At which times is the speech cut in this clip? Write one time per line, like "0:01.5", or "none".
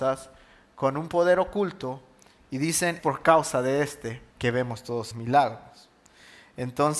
0:03.0
0:04.3
0:05.1